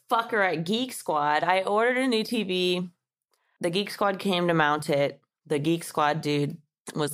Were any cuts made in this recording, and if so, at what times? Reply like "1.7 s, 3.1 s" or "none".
none